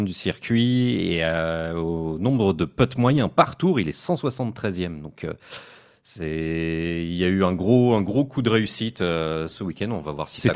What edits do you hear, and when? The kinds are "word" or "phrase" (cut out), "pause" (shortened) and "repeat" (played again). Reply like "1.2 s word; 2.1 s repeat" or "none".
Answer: none